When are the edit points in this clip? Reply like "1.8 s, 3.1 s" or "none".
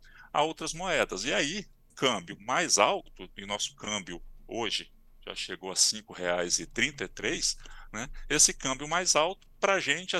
1.9 s

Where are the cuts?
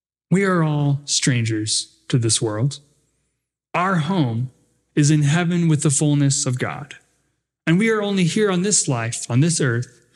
none

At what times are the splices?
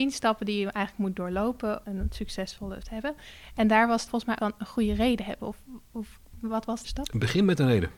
1.8 s, 2.8 s, 4.1 s, 4.4 s, 6.8 s

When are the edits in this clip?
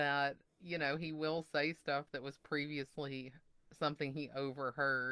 none

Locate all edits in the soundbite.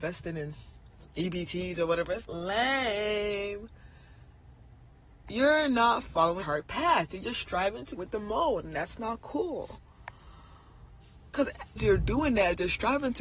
2.2 s, 6.4 s, 8.0 s, 11.8 s

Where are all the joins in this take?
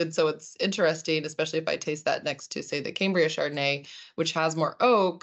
none

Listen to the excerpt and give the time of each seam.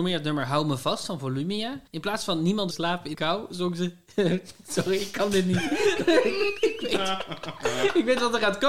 1.9 s, 2.7 s, 3.1 s

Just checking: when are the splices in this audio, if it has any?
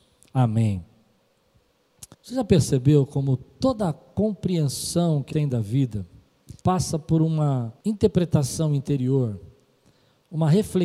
2.1 s, 5.3 s, 6.6 s, 7.8 s

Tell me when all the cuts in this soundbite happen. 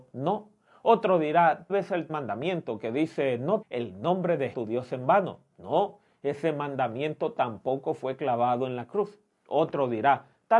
1.7 s, 2.1 s, 3.6 s, 4.5 s

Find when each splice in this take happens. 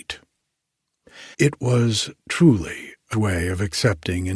1.3 s, 2.2 s, 3.1 s

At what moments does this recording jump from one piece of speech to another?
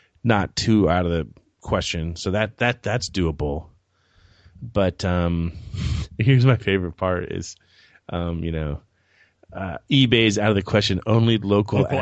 none

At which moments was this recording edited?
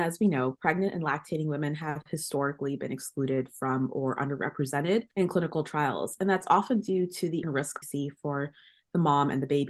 7.4 s, 7.8 s

